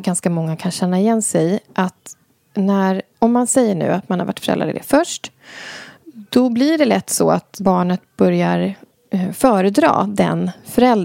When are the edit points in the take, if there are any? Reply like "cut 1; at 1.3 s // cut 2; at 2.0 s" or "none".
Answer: none